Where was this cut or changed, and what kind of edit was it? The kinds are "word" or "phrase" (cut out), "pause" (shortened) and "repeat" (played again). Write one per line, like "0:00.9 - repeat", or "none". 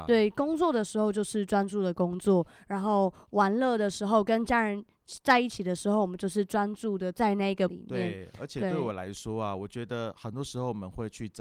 0:07.7 - word

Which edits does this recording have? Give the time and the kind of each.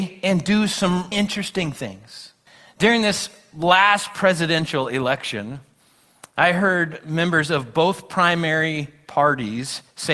0:01.1 - word
0:02.5 - pause

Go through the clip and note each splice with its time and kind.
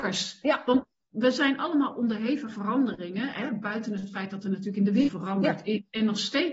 0:02.5 - word
0:05.1 - phrase

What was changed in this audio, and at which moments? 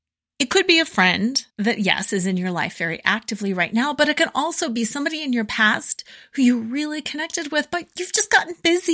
0:01.5 - pause

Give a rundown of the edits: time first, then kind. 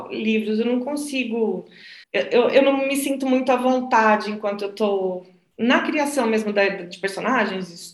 0:02.0 - pause

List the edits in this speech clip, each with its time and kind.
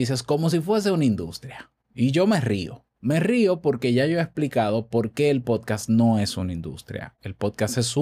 0:02.9 - pause

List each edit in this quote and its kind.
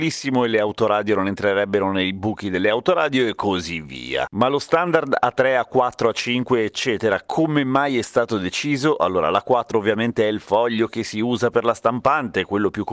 none

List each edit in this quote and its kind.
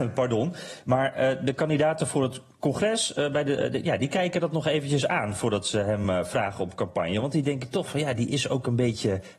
none

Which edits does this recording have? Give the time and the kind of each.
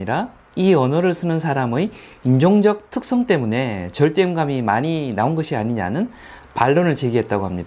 none

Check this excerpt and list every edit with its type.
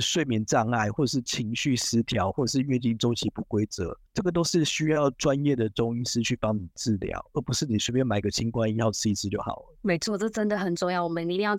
0:04.1 - pause

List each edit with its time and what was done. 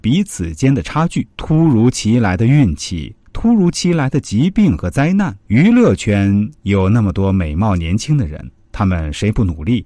0:01.3 - pause
0:05.4 - pause

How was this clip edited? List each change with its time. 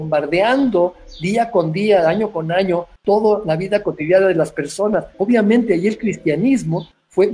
0:03.0 - pause
0:05.1 - pause

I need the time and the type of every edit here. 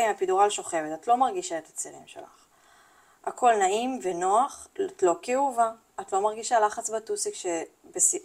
none

